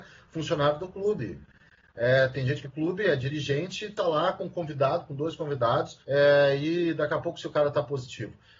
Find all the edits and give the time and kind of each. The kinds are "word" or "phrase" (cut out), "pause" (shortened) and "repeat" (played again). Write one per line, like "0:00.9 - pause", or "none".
0:02.6 - phrase
0:06.0 - pause